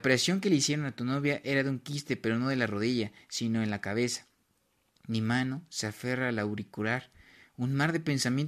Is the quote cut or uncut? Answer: uncut